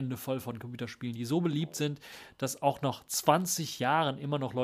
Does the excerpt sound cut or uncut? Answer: uncut